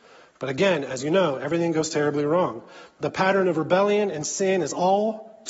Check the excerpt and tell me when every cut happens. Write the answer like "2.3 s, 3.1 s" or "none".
none